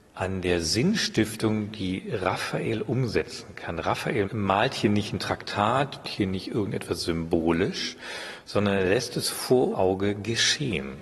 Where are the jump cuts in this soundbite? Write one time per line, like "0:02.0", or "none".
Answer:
0:06.0
0:09.7